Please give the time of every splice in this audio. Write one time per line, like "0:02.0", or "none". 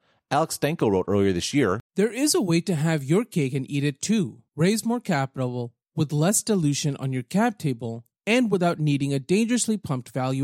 0:01.8
0:04.5